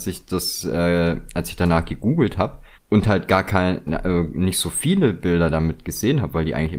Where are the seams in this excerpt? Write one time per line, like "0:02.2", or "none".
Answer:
0:02.7